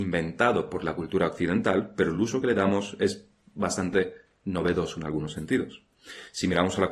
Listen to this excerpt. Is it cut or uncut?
uncut